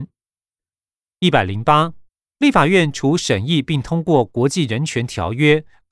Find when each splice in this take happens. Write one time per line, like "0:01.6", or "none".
0:02.1